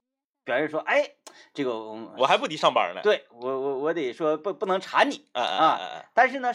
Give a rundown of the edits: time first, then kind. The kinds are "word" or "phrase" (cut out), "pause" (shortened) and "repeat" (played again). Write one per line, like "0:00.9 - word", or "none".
none